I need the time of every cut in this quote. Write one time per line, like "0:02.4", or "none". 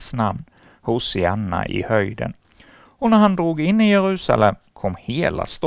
none